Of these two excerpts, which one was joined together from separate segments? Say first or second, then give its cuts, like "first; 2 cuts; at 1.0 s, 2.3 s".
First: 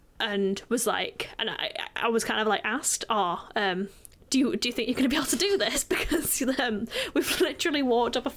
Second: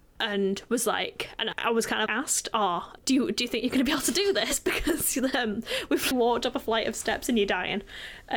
second; 4 cuts; at 1.5 s, 2.1 s, 3.0 s, 6.1 s